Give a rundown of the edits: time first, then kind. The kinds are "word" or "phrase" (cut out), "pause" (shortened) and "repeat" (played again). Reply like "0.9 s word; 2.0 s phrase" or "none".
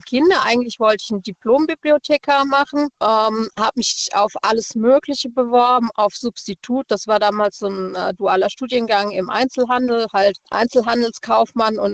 2.9 s pause; 10.4 s pause